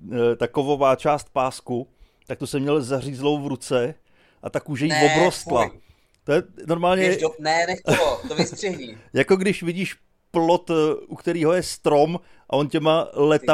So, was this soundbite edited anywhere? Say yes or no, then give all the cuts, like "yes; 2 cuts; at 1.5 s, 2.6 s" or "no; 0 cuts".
no; 0 cuts